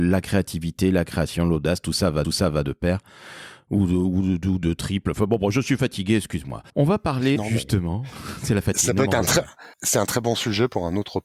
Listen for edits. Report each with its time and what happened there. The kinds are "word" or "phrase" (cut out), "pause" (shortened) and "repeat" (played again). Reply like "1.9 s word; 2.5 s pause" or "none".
2.2 s repeat; 6.7 s pause; 7.4 s word; 9.7 s pause